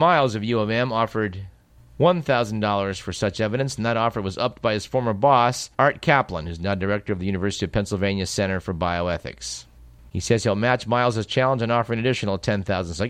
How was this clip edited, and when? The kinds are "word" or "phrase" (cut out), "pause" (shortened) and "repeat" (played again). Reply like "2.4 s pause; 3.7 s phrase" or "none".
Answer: 5.7 s pause